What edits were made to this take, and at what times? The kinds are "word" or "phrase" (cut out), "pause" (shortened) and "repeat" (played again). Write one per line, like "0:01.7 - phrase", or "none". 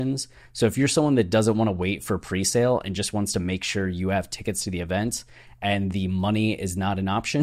none